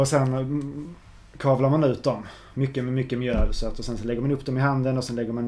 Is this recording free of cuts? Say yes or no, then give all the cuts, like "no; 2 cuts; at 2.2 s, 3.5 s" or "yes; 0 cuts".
yes; 0 cuts